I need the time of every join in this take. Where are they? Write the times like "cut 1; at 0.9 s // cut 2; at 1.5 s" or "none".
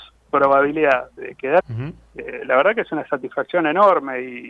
cut 1; at 1.2 s // cut 2; at 1.6 s